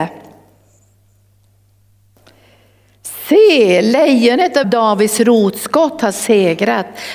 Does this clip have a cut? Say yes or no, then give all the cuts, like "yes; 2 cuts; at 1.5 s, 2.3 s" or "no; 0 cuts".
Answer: yes; 1 cut; at 4.6 s